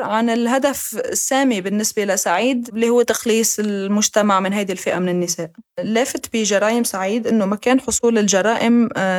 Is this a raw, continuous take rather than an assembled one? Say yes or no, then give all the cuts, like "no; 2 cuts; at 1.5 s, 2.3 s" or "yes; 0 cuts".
no; 1 cut; at 5.7 s